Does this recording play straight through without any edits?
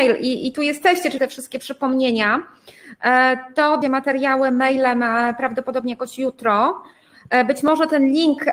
no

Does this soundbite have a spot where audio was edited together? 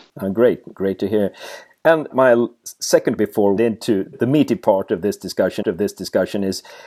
yes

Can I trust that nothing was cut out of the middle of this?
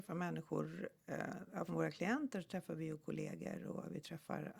no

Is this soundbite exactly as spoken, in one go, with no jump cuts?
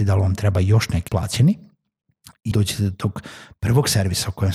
no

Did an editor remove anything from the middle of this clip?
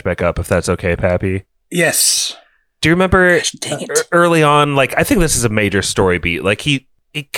no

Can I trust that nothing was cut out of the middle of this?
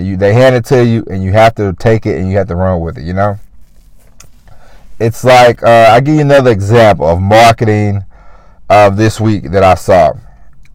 yes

